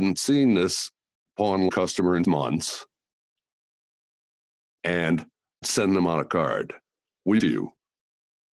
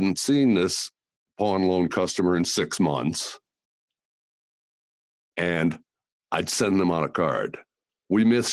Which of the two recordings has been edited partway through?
first; 4 cuts; at 1.7 s, 2.2 s, 5.6 s, 7.4 s

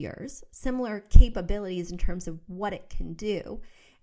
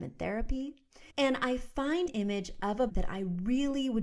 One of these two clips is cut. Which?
second; 3 cuts; at 1.1 s, 2.1 s, 2.9 s

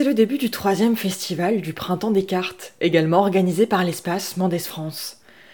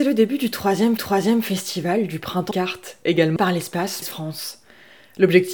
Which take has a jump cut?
second; 4 cuts; at 1.0 s, 2.5 s, 3.4 s, 4.0 s

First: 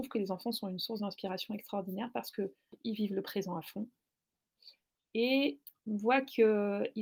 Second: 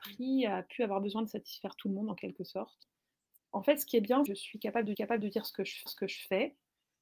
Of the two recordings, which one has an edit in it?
second; 3 cuts; at 4.3 s, 4.9 s, 5.9 s

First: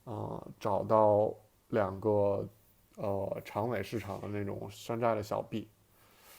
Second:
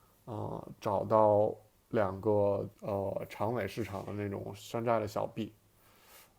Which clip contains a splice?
second; 1 cut; at 2.7 s

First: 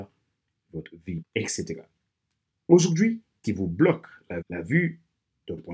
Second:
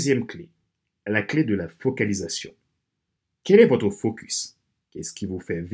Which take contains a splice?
first; 3 cuts; at 1.2 s, 3.4 s, 4.4 s

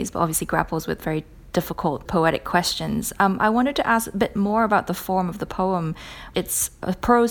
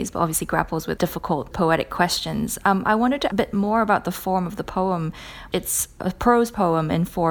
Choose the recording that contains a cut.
second; 2 cuts; at 1.0 s, 3.3 s

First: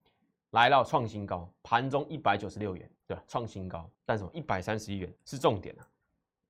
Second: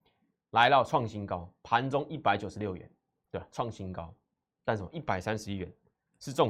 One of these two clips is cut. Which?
first; 3 cuts; at 3.0 s, 3.9 s, 5.2 s

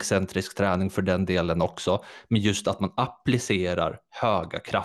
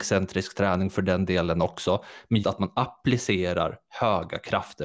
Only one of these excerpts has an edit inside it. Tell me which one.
second; 1 cut; at 2.4 s

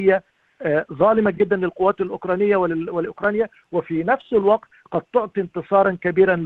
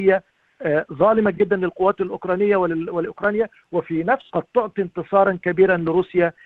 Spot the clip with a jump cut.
second; 1 cut; at 4.3 s

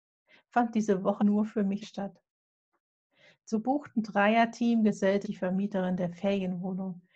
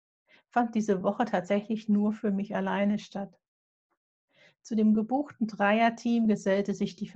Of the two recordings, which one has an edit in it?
first; 4 cuts; at 1.2 s, 1.8 s, 3.5 s, 5.2 s

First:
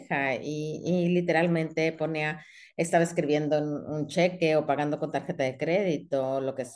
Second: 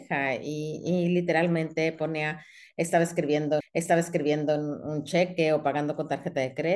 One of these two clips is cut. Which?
second; 1 cut; at 3.6 s

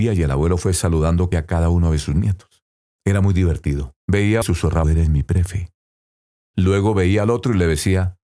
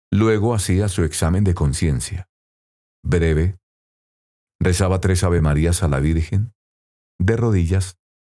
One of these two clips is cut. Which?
first; 5 cuts; at 1.3 s, 2.8 s, 4.0 s, 4.4 s, 4.8 s

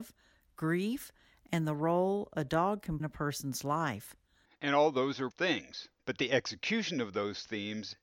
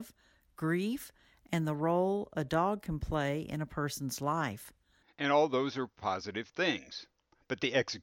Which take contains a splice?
first; 3 cuts; at 3.0 s, 5.3 s, 6.0 s

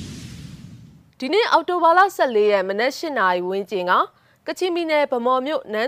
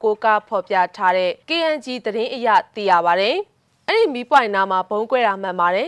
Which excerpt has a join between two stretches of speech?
second; 1 cut; at 1.4 s

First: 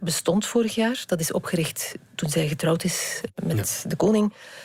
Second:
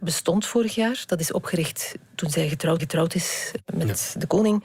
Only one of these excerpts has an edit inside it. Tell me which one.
second; 1 cut; at 2.8 s

